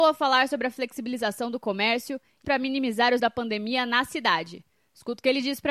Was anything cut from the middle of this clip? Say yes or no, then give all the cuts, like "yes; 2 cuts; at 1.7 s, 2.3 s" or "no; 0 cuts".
yes; 2 cuts; at 2.4 s, 3.2 s